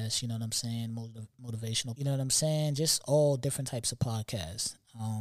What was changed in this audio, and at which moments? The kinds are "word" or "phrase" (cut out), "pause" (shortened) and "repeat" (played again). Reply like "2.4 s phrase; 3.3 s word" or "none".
2.0 s phrase